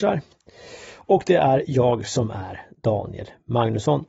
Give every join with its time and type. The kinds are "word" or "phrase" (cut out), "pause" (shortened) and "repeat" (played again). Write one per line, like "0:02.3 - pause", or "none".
none